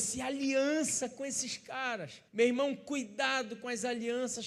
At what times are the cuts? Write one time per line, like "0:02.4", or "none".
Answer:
0:02.3